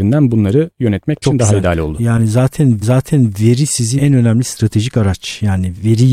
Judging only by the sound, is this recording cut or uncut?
cut